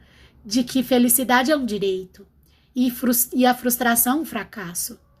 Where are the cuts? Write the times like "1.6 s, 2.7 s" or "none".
none